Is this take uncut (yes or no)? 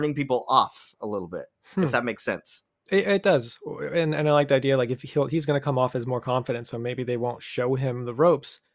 yes